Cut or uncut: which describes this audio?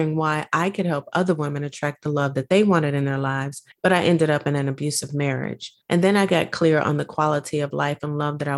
cut